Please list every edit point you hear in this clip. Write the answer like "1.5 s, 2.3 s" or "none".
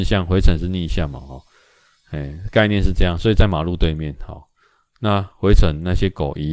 none